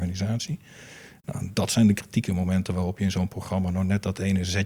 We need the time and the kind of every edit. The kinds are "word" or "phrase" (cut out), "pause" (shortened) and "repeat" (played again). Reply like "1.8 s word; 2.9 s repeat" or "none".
none